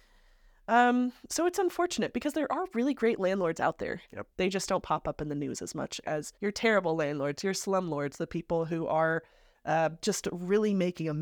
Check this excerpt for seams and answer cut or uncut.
cut